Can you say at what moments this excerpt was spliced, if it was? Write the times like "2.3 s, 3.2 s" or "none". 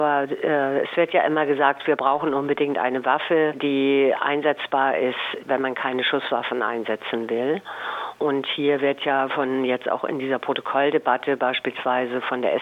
none